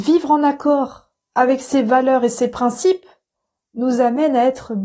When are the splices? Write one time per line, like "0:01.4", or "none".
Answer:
none